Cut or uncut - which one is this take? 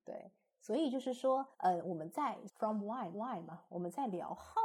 cut